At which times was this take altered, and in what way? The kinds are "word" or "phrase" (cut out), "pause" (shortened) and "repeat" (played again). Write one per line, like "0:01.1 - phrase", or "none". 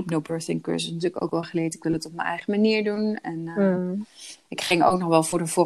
none